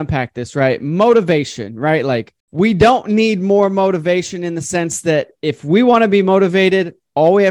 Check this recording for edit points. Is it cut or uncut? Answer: cut